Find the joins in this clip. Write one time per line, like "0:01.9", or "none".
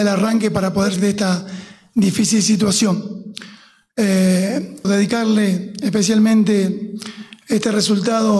0:01.0
0:04.8